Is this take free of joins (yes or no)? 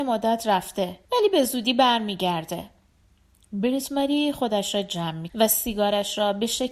no